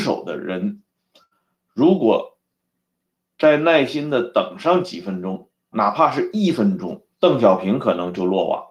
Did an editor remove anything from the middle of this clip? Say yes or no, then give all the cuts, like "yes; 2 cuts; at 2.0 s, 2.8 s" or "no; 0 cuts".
yes; 2 cuts; at 5.7 s, 7.1 s